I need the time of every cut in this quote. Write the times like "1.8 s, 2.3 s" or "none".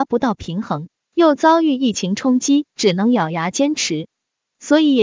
2.7 s